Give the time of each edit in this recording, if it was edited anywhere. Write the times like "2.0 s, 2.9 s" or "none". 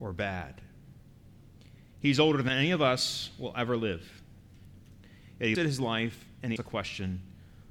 5.5 s, 6.6 s